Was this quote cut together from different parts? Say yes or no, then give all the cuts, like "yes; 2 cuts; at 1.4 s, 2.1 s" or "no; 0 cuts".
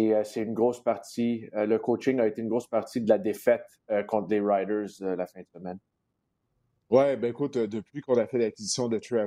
no; 0 cuts